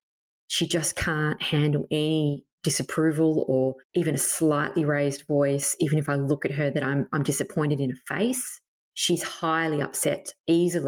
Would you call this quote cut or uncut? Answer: cut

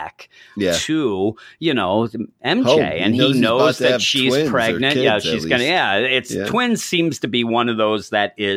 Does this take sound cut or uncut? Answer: uncut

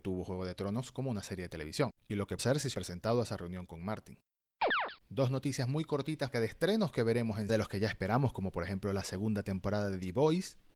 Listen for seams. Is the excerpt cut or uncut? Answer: cut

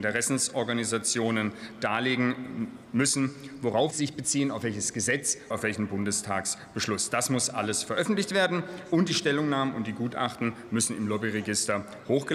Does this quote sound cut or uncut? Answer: cut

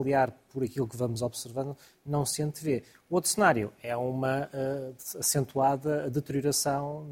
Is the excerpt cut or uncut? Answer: uncut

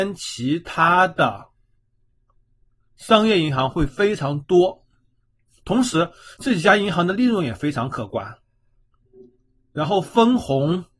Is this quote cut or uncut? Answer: uncut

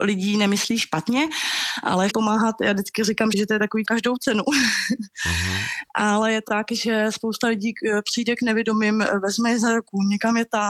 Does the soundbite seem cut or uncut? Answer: cut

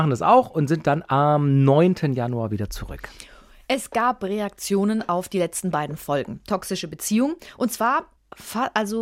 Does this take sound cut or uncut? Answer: uncut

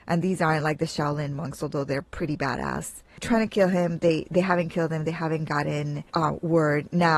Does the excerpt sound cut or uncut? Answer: uncut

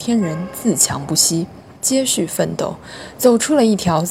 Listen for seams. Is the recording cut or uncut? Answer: cut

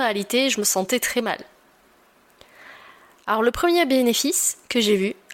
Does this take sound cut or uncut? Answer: uncut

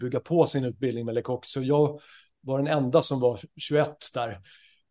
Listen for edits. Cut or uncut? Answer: uncut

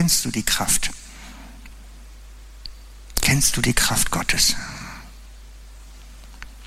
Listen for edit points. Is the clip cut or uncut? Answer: uncut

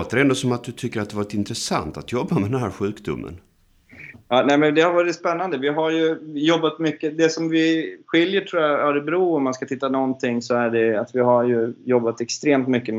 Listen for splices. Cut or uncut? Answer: uncut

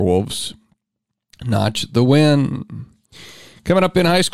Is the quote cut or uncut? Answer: uncut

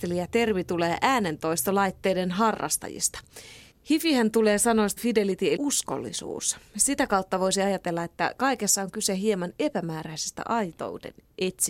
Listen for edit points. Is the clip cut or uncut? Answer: cut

